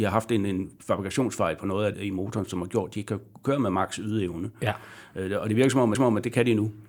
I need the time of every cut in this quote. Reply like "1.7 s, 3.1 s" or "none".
1.9 s, 5.9 s